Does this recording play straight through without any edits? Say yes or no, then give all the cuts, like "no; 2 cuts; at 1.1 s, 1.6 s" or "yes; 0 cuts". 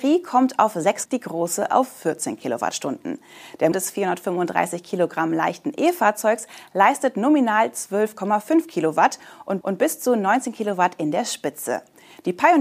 no; 3 cuts; at 1.1 s, 3.7 s, 9.6 s